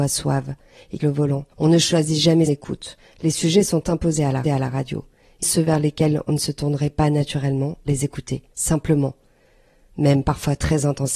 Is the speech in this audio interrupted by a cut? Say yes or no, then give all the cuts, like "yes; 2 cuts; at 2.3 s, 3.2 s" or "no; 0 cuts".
yes; 7 cuts; at 1.0 s, 1.5 s, 2.5 s, 4.4 s, 5.4 s, 7.9 s, 8.5 s